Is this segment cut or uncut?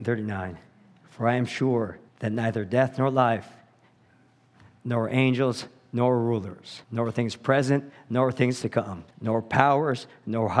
cut